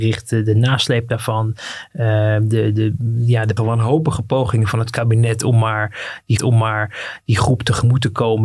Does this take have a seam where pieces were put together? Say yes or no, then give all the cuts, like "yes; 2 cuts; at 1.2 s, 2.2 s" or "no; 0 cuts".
yes; 2 cuts; at 3.6 s, 6.4 s